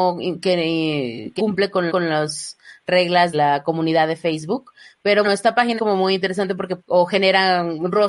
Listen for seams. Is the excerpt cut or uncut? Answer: cut